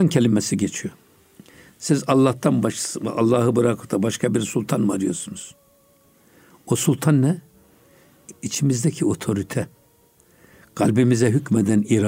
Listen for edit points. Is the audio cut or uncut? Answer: uncut